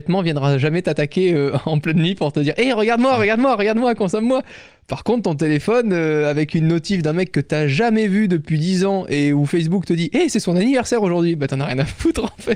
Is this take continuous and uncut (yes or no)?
yes